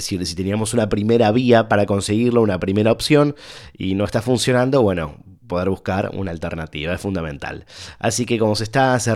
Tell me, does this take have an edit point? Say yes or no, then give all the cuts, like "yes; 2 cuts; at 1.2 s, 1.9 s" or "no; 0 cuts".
no; 0 cuts